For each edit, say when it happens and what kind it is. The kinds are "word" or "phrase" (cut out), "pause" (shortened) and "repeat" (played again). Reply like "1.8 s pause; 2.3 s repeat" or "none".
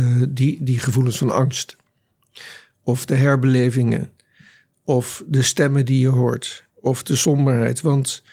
none